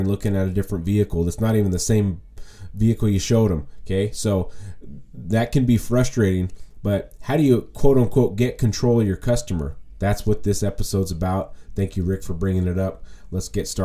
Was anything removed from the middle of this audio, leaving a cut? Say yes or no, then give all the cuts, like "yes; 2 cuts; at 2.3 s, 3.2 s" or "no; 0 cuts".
no; 0 cuts